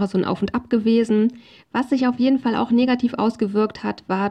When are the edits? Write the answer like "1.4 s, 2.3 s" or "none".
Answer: none